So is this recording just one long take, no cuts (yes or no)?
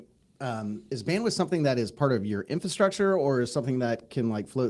yes